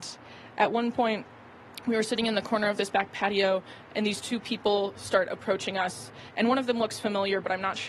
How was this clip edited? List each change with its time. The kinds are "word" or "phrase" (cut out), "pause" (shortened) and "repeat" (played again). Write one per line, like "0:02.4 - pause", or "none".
none